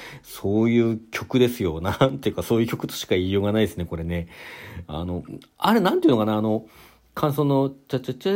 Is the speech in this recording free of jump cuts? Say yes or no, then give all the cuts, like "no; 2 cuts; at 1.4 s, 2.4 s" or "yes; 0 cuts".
yes; 0 cuts